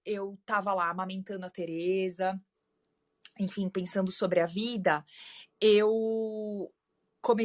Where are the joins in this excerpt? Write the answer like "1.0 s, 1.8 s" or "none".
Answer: none